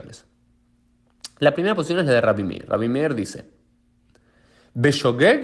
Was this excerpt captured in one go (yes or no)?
yes